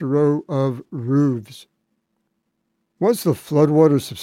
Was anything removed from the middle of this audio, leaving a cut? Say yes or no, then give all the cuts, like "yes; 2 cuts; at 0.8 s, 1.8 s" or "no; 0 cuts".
no; 0 cuts